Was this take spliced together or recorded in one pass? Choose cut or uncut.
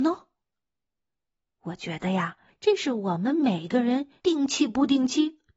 cut